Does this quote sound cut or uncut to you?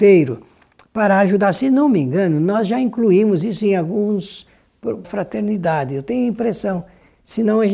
cut